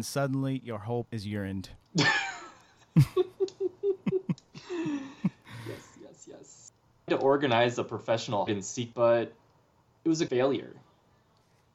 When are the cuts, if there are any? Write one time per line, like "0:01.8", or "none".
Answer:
0:01.0
0:07.1
0:08.5
0:08.9
0:10.3